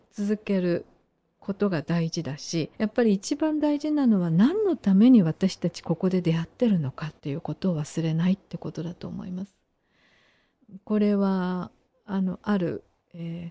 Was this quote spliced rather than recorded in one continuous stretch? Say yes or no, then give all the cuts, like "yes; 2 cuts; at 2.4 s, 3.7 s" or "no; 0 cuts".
yes; 3 cuts; at 2.7 s, 7.2 s, 11.9 s